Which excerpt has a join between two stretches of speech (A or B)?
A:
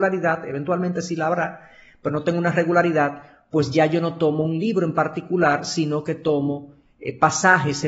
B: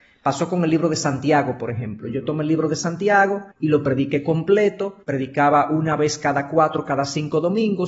B